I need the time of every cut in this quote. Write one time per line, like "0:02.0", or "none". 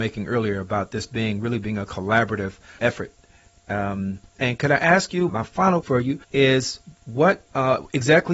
0:02.8
0:05.3
0:05.8
0:06.2